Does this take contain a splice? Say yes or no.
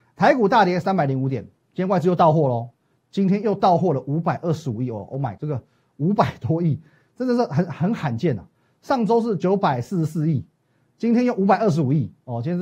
yes